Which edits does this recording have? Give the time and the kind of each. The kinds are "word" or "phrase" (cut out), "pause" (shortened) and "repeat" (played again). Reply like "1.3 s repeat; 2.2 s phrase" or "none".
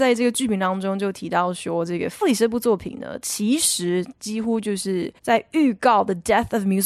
2.2 s word; 5.2 s pause